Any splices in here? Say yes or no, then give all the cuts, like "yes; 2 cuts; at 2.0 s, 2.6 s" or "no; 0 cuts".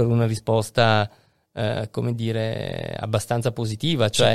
no; 0 cuts